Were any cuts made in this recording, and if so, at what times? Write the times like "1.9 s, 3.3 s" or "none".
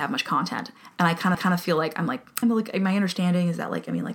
1.3 s, 2.4 s